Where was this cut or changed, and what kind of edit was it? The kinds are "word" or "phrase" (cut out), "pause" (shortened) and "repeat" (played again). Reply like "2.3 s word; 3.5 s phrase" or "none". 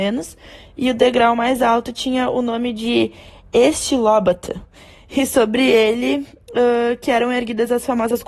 none